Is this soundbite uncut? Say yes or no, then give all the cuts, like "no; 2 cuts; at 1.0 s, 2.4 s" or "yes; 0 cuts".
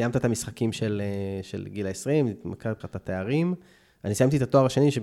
no; 1 cut; at 2.8 s